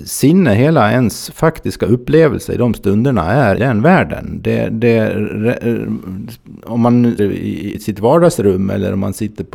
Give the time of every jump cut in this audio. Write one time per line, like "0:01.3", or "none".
0:03.6
0:07.2
0:07.7